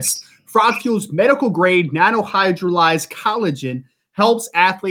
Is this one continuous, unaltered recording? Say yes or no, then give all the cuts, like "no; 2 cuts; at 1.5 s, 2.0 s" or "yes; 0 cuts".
yes; 0 cuts